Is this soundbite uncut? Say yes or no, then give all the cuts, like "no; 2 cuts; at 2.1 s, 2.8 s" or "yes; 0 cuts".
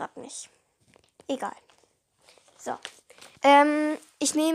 no; 1 cut; at 3.3 s